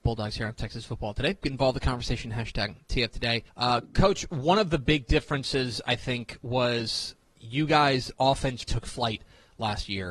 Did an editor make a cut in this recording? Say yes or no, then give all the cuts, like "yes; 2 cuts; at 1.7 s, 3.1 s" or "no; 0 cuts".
yes; 2 cuts; at 3.5 s, 8.6 s